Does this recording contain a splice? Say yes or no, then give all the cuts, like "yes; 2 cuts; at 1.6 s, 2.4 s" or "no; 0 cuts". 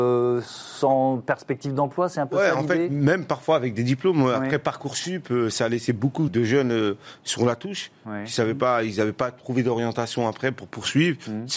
yes; 1 cut; at 6.3 s